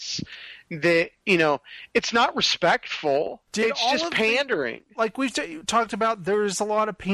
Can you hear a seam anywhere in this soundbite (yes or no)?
yes